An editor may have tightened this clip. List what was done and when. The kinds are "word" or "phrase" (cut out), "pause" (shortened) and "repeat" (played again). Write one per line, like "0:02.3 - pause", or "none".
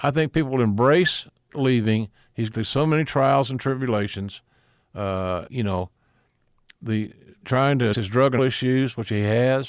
0:01.5 - word
0:02.5 - word
0:05.5 - word
0:07.4 - word
0:07.9 - word
0:08.4 - word